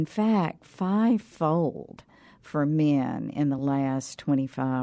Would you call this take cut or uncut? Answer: uncut